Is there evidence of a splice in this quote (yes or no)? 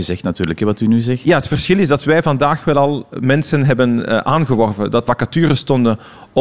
yes